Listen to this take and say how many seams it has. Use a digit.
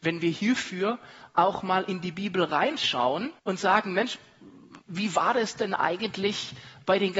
1